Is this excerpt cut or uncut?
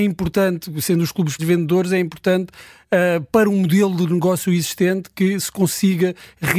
cut